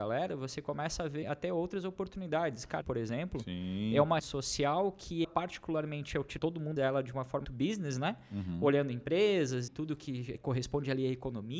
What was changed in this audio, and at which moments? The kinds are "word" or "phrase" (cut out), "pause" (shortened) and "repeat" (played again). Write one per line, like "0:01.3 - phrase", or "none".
0:01.2 - word
0:02.8 - word
0:04.2 - word
0:05.2 - word
0:06.4 - word
0:06.8 - word
0:07.4 - word
0:09.7 - word
0:10.3 - word